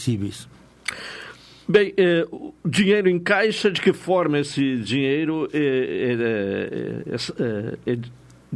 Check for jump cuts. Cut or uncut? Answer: uncut